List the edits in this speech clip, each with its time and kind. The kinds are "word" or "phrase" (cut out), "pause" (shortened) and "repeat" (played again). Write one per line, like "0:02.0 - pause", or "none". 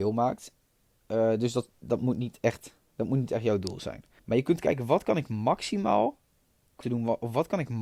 0:04.2 - pause
0:06.8 - word